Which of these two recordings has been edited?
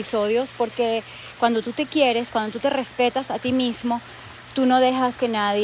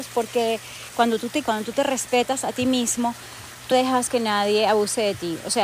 second; 2 cuts; at 1.4 s, 3.7 s

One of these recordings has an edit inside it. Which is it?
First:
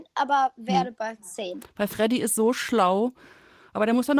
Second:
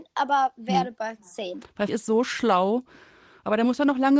second; 1 cut; at 1.9 s

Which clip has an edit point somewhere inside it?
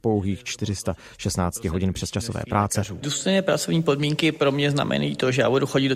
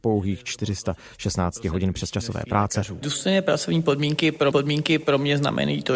second; 1 cut; at 4.5 s

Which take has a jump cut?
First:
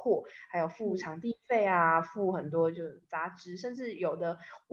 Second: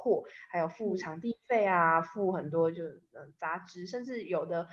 first; 1 cut; at 3.0 s

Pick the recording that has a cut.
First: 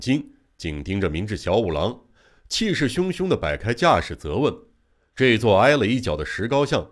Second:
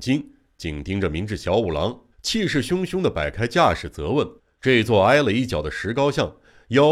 second; 2 cuts; at 2.1 s, 4.4 s

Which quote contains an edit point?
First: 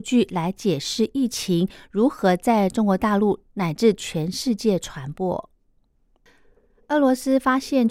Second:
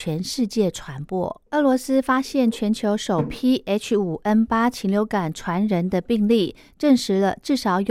second; 1 cut; at 1.5 s

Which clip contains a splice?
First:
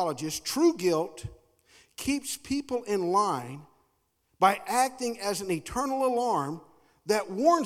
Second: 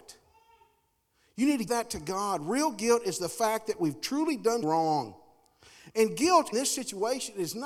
second; 3 cuts; at 1.7 s, 4.6 s, 6.5 s

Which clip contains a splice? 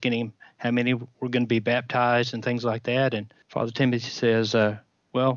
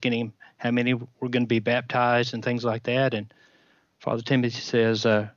first; 1 cut; at 3.4 s

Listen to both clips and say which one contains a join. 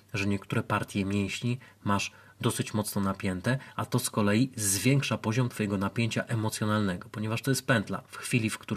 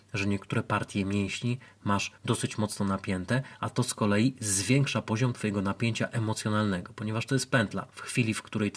second; 1 cut; at 2.2 s

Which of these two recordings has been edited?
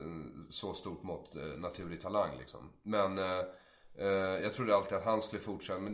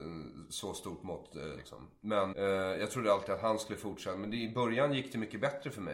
second; 2 cuts; at 1.6 s, 2.3 s

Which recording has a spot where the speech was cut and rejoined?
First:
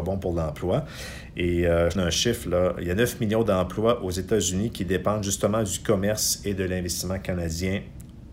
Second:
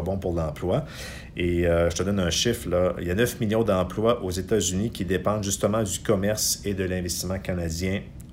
first; 1 cut; at 2.0 s

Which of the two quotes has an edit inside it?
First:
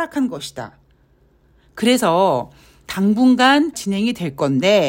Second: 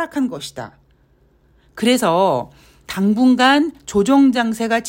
first; 1 cut; at 3.7 s

